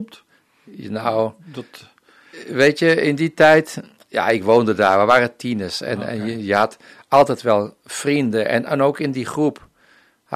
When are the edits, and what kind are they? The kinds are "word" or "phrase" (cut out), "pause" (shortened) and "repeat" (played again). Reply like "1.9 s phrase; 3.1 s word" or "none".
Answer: none